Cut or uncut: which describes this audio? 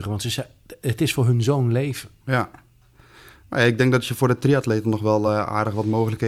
uncut